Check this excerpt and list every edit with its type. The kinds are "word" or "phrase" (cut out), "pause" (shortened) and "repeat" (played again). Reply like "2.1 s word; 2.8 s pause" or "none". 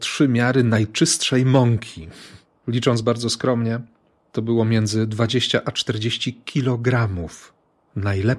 none